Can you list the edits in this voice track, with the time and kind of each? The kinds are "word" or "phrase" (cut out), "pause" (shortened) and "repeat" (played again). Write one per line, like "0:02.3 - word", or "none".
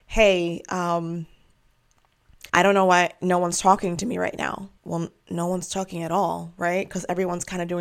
0:02.5 - pause
0:04.8 - pause